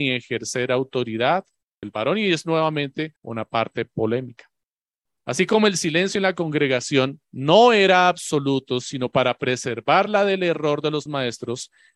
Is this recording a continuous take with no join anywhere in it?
no; 4 cuts; at 1.8 s, 3.2 s, 7.2 s, 11.1 s

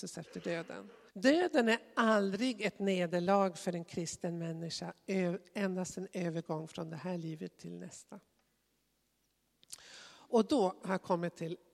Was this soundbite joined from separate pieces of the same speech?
yes; 1 cut; at 1.1 s

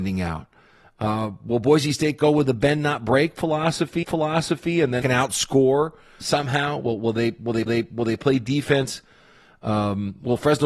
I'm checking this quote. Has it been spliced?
yes; 4 cuts; at 4.0 s, 5.0 s, 6.2 s, 7.7 s

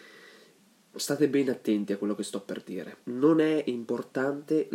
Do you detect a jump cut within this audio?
yes; 1 cut; at 3.0 s

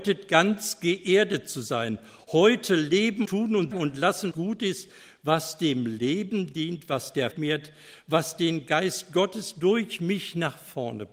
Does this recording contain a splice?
yes; 4 cuts; at 3.2 s, 3.7 s, 4.3 s, 7.3 s

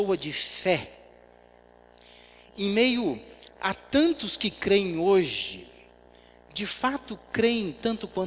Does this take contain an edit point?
no; 0 cuts

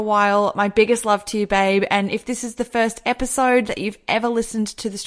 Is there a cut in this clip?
no; 0 cuts

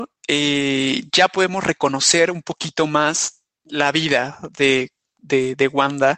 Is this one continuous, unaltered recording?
yes; 0 cuts

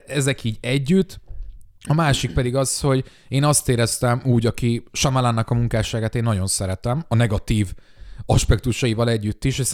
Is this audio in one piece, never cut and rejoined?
yes; 0 cuts

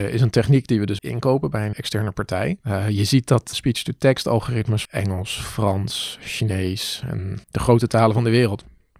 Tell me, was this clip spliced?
yes; 6 cuts; at 1.0 s, 1.7 s, 2.6 s, 3.5 s, 4.8 s, 7.4 s

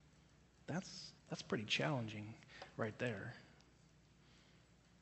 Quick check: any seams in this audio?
yes; 1 cut; at 1.2 s

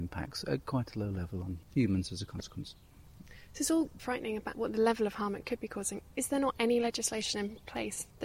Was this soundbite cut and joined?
yes; 1 cut; at 4.0 s

